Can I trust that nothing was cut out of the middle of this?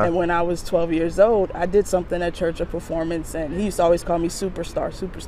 yes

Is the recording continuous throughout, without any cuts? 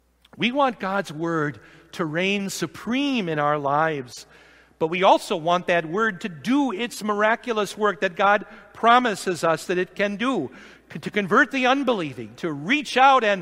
yes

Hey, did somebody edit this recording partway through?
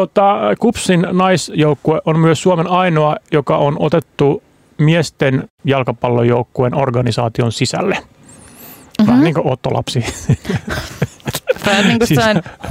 no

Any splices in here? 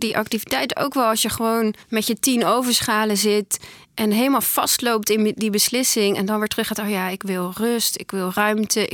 yes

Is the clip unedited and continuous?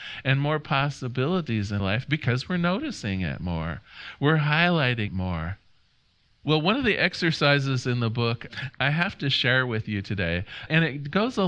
no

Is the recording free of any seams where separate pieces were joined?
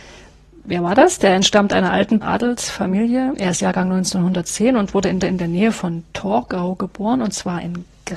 no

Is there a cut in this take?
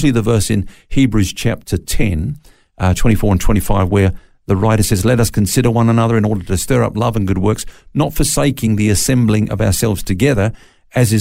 no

